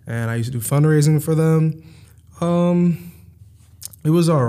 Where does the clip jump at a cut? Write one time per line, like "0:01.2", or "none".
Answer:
none

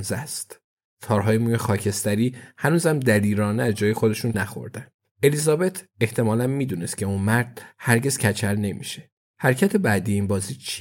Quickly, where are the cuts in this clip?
0:04.3

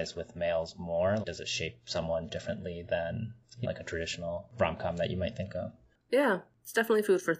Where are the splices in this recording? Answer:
0:01.2
0:03.6

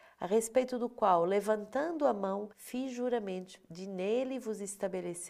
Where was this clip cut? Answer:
0:02.5

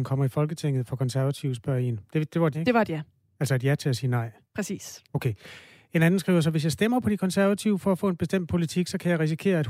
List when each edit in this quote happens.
0:02.5

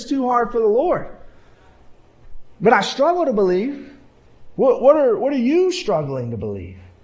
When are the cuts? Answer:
none

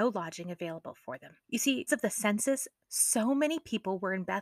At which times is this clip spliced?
0:01.4
0:01.9

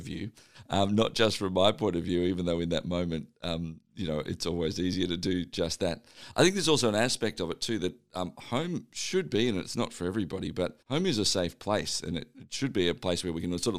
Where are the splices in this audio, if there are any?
0:10.8

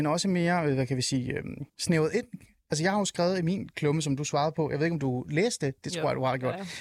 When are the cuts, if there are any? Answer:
0:01.7

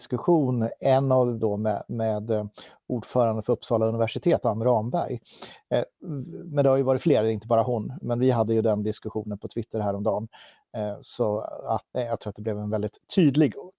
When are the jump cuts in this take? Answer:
0:01.4
0:08.0
0:11.9

